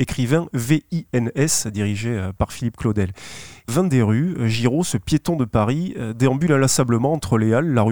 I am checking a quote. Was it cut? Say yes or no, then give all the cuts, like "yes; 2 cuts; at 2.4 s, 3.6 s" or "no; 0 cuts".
yes; 1 cut; at 3.7 s